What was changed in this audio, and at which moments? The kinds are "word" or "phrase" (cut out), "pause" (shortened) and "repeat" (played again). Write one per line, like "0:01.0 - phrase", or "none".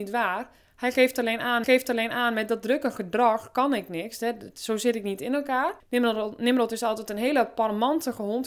0:01.6 - repeat
0:05.8 - pause